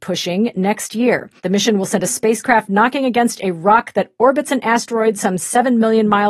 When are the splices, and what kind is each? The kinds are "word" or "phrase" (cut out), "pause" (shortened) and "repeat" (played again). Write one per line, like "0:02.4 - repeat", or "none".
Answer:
0:01.4 - pause